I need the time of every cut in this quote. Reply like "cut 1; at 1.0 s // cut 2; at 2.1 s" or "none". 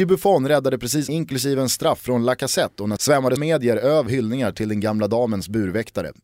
cut 1; at 1.1 s // cut 2; at 3.0 s // cut 3; at 3.4 s // cut 4; at 4.1 s